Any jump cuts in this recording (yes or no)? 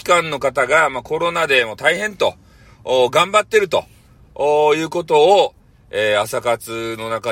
no